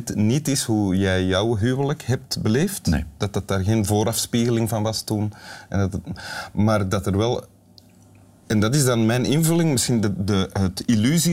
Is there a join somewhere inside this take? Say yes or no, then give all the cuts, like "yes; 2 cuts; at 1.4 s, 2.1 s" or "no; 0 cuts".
no; 0 cuts